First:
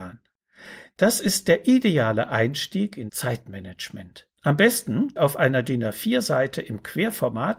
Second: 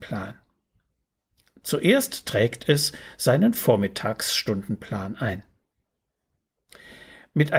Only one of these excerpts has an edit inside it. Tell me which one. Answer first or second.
first